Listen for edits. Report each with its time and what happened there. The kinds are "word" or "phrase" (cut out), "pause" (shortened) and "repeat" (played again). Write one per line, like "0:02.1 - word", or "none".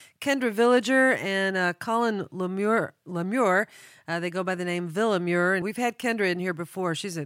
0:05.6 - word